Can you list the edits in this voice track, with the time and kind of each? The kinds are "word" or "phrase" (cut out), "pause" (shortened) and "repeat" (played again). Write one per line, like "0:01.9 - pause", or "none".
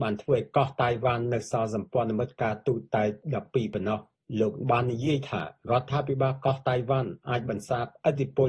0:04.6 - word